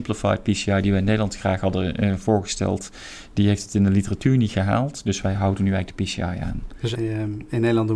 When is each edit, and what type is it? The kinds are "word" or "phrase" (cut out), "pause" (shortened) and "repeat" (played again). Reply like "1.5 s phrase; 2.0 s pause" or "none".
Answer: 7.0 s word